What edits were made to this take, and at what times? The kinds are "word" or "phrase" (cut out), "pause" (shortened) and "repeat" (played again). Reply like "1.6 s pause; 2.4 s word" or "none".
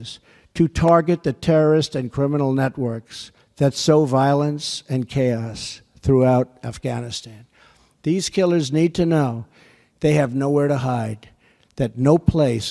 none